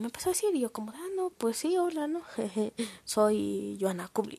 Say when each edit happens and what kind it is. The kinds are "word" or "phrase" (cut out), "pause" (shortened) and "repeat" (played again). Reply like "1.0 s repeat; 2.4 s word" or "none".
none